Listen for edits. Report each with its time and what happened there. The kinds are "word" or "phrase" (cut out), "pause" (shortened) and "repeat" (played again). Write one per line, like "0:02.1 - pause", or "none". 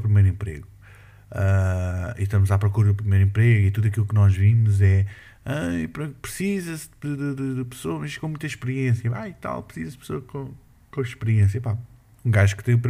none